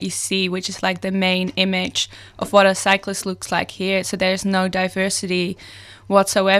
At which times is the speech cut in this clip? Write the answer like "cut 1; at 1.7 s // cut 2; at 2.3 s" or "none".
none